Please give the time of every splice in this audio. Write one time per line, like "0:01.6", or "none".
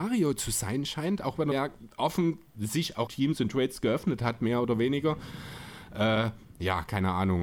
0:01.5
0:02.5
0:03.1